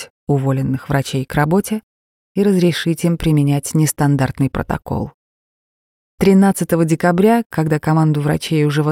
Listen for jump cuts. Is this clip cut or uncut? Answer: uncut